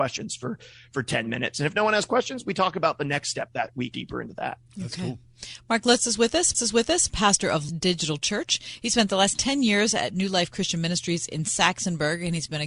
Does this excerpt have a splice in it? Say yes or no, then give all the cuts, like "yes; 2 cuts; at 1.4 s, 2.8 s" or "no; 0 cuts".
yes; 3 cuts; at 3.9 s, 6.5 s, 7.7 s